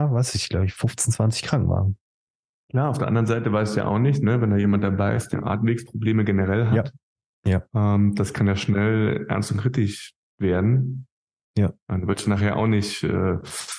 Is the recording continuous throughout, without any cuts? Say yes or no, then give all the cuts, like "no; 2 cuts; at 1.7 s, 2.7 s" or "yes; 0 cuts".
no; 1 cut; at 5.3 s